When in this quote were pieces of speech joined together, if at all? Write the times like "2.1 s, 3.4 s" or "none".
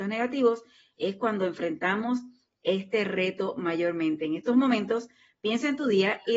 none